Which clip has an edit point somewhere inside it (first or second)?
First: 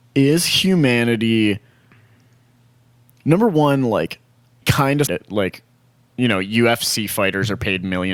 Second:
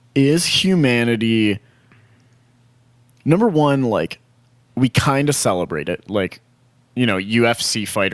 first